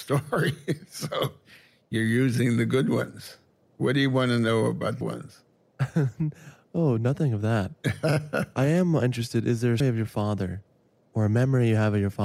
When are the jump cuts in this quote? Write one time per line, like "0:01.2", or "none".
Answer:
0:05.0
0:09.8